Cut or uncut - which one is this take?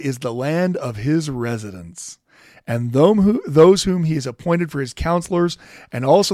uncut